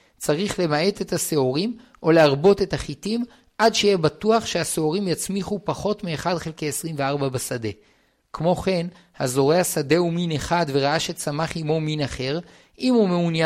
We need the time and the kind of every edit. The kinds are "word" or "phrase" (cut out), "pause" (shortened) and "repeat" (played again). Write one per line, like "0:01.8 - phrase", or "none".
none